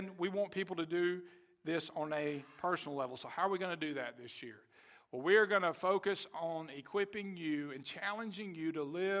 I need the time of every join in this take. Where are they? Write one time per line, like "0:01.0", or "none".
none